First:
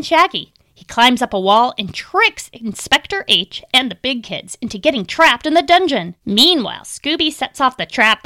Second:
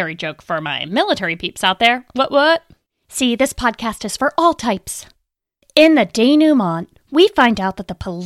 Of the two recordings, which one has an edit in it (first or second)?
first